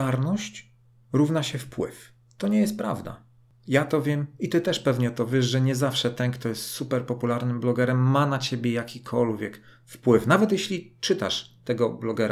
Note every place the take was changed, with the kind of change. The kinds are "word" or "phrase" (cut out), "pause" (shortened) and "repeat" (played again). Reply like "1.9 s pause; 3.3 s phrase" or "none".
none